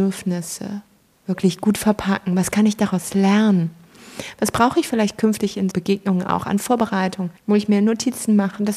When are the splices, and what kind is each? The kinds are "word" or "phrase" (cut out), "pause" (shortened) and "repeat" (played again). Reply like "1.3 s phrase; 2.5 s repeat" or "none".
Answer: 5.7 s word; 7.4 s pause